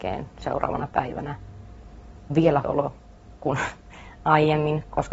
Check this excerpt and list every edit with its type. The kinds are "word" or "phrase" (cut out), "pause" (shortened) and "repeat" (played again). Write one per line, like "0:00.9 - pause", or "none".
0:02.3 - word
0:02.6 - word